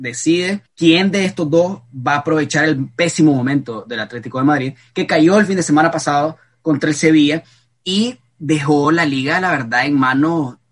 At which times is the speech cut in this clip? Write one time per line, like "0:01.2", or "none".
none